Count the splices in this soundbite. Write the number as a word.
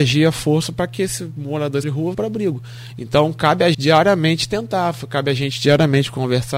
three